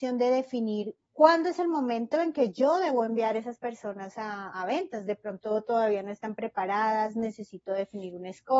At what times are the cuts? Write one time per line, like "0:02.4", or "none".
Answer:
0:01.1
0:04.5